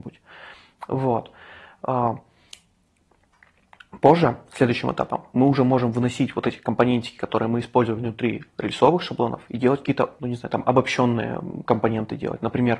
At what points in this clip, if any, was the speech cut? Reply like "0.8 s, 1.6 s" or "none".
10.2 s

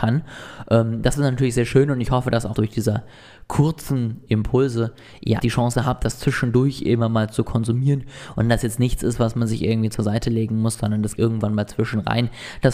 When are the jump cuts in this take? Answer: 2.5 s, 5.4 s, 11.2 s

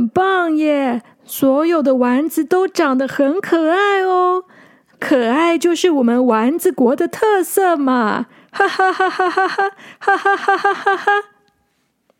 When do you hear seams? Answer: none

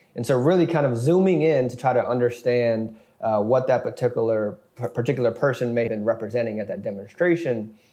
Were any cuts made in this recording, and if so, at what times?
5.9 s

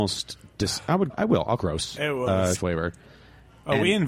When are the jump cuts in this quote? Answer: 1.1 s, 1.6 s, 2.5 s

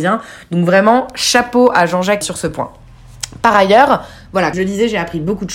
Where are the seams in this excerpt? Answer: 2.2 s, 4.5 s

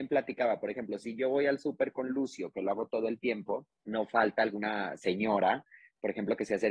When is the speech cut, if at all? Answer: 3.8 s

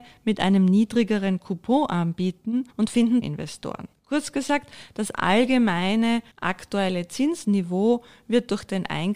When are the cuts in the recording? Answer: 2.7 s, 3.2 s, 3.9 s, 6.3 s

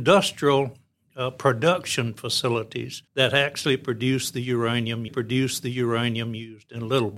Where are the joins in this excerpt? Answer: 3.1 s, 5.1 s

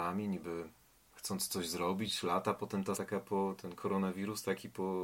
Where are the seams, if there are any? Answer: 2.9 s

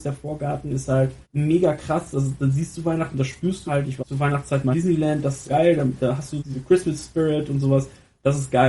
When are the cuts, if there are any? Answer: 1.2 s, 3.7 s, 4.0 s, 4.7 s, 5.5 s, 6.4 s

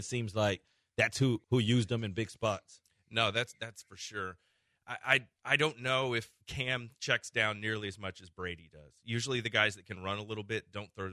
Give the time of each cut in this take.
1.4 s, 5.4 s, 6.4 s

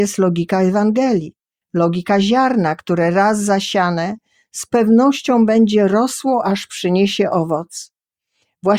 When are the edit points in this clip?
none

